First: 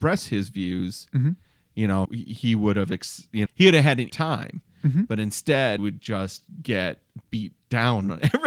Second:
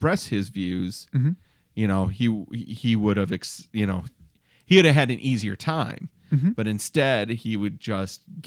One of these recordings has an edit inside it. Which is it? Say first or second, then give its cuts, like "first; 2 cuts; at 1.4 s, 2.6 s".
first; 4 cuts; at 2.1 s, 3.5 s, 4.1 s, 5.8 s